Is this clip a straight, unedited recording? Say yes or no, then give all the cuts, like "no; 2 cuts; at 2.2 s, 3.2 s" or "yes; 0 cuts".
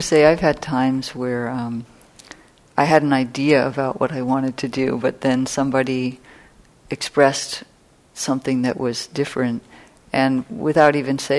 yes; 0 cuts